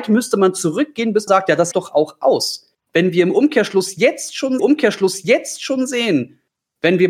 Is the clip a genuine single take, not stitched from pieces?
no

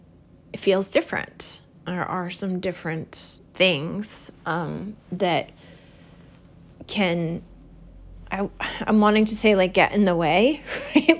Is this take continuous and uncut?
no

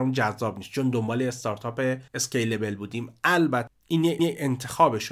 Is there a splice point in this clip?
yes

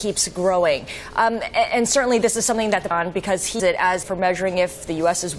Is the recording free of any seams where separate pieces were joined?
no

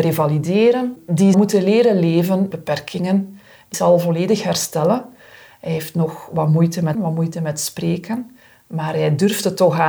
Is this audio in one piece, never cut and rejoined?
no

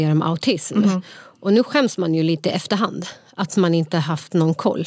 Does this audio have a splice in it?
no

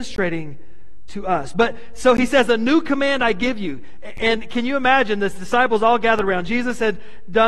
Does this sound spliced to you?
no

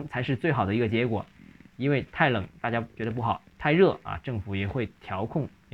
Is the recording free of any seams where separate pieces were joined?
yes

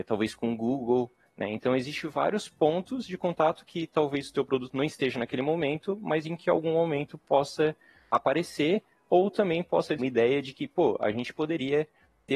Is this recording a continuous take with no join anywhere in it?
no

